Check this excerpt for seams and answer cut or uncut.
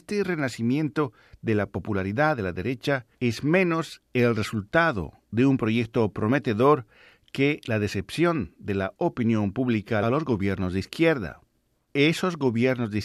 cut